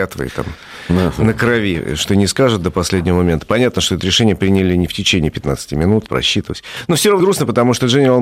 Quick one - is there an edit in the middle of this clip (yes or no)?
yes